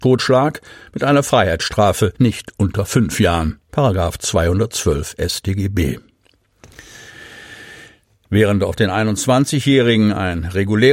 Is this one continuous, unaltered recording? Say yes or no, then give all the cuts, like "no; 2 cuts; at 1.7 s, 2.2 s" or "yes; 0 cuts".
no; 1 cut; at 2.2 s